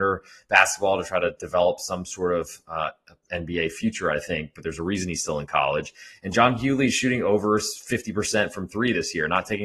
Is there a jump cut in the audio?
no; 0 cuts

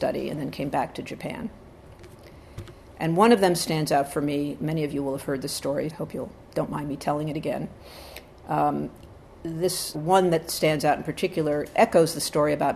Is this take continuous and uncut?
no; 4 cuts; at 5.9 s, 6.4 s, 9.9 s, 11.7 s

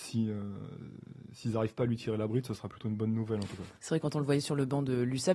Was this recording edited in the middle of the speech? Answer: yes; 1 cut; at 3.8 s

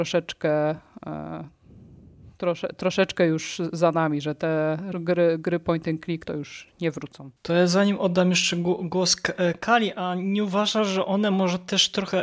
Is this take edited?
yes; 3 cuts; at 4.9 s, 6.3 s, 7.4 s

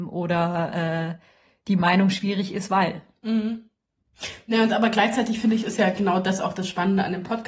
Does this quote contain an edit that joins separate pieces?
no; 0 cuts

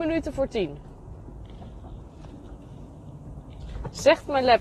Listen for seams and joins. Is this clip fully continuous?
yes; 0 cuts

